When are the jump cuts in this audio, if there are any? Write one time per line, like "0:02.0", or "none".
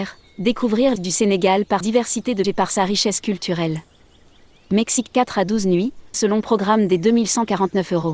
0:01.0
0:01.8
0:02.4
0:06.1

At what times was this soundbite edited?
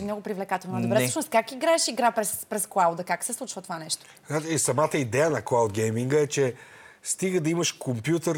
none

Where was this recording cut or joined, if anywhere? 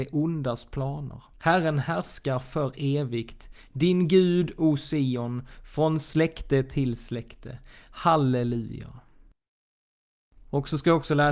0:01.3

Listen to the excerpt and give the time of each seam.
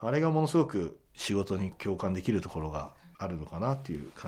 0:01.1

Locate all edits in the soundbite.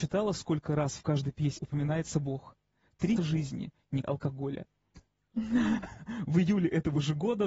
0:01.6
0:03.2
0:04.0

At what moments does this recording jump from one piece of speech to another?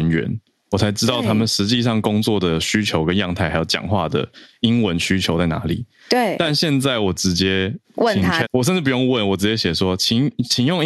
0:07.8
0:08.4

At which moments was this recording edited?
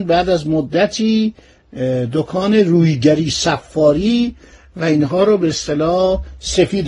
none

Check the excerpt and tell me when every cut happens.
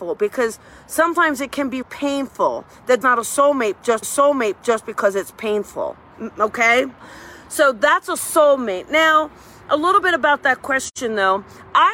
0:01.8
0:03.0
0:04.0

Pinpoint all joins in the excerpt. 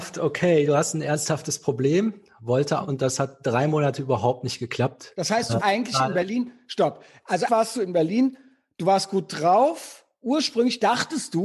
0:02.8
0:05.6
0:07.5

